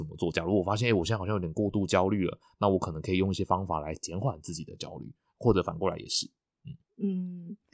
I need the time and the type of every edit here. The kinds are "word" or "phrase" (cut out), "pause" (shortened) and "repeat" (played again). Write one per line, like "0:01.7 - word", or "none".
none

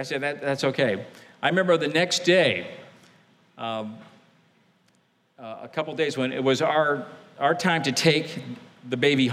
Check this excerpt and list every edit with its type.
none

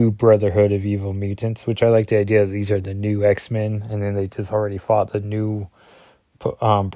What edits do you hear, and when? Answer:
none

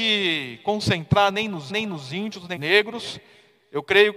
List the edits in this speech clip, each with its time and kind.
0:01.7 - repeat
0:02.6 - word

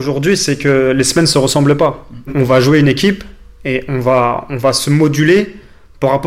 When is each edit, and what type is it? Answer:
none

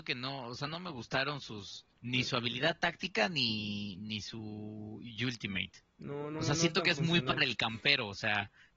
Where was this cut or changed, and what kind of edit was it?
0:02.0 - pause

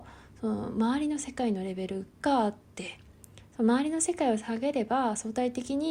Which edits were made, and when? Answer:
0:02.6 - pause

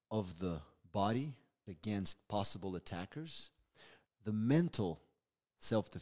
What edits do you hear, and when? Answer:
0:01.7 - word
0:04.1 - word

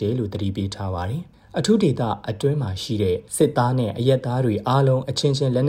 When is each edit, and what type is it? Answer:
0:03.3 - pause

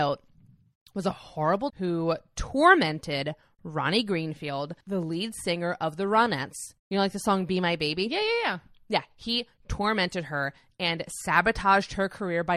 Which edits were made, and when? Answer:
0:01.7 - phrase
0:04.8 - pause
0:06.8 - pause

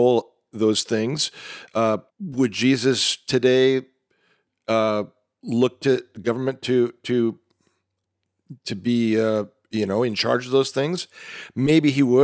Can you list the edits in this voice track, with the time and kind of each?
0:02.1 - pause

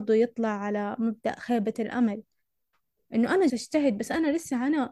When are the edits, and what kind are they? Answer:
0:03.5 - word

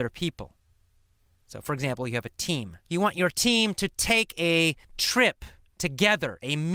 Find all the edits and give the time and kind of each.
0:02.8 - pause
0:04.8 - pause

